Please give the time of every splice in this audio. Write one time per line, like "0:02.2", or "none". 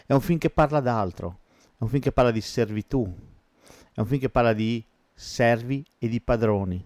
none